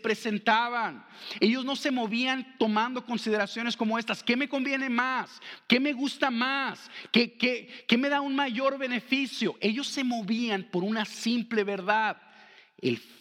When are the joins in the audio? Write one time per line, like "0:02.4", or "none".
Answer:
none